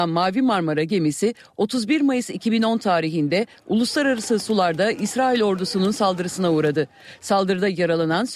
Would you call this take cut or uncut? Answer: uncut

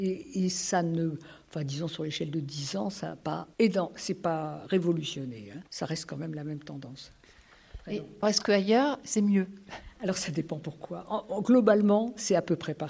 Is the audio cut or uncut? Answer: cut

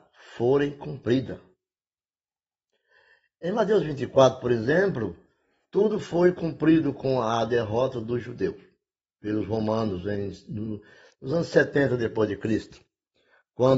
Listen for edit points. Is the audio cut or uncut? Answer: uncut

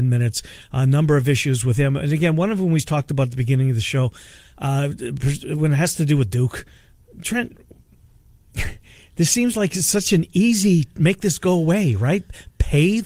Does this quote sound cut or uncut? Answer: uncut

